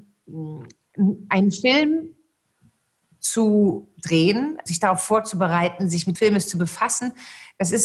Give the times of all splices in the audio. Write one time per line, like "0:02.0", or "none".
0:06.2